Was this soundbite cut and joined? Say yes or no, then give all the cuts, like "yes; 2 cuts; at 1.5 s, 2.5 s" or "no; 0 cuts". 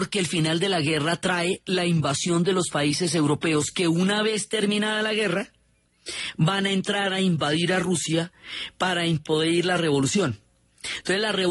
no; 0 cuts